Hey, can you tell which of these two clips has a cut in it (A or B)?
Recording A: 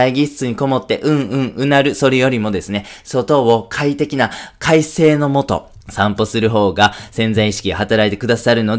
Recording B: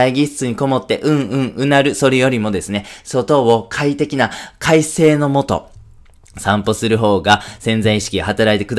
A